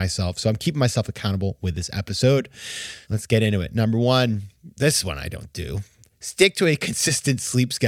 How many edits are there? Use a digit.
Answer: 1